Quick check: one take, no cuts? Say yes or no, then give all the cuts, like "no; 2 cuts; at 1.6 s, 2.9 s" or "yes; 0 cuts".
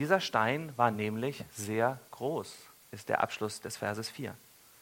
yes; 0 cuts